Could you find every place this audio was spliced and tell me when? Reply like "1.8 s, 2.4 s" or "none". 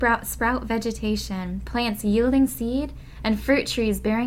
none